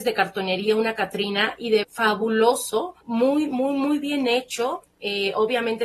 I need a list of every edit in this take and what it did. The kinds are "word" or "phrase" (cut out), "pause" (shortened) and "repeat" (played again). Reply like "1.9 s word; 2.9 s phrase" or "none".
1.8 s phrase; 3.0 s pause